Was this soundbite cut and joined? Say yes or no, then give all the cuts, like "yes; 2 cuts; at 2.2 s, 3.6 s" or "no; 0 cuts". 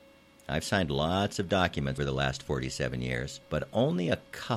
yes; 2 cuts; at 2.0 s, 3.4 s